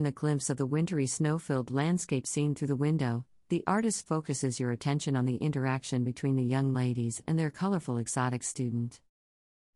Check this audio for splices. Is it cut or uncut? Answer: uncut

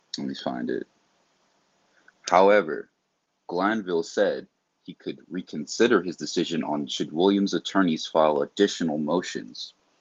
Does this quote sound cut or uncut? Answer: cut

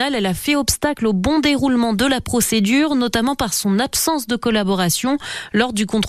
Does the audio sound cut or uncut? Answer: uncut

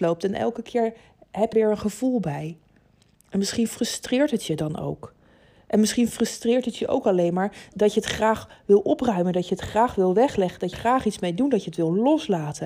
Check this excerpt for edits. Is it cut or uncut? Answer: cut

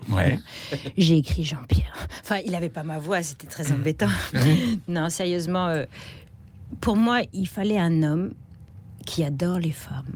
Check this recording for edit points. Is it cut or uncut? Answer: uncut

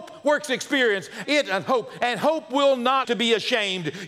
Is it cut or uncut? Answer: cut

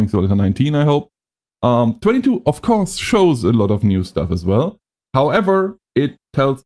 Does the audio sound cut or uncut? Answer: uncut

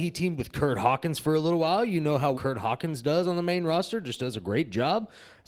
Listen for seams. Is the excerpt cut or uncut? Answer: cut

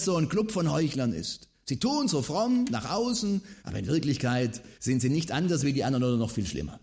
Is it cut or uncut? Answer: cut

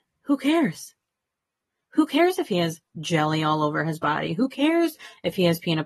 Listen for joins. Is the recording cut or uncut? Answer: uncut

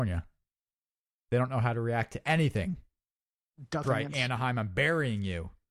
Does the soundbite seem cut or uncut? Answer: cut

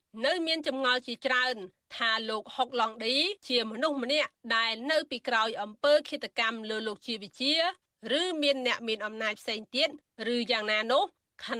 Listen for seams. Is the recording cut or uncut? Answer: cut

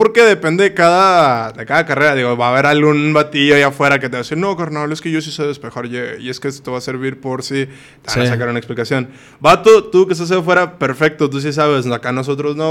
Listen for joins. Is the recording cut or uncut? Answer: uncut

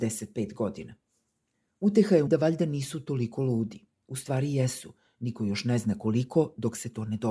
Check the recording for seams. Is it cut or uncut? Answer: cut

